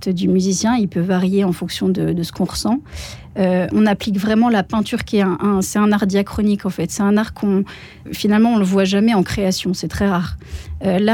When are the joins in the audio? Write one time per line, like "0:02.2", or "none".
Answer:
0:03.7
0:08.1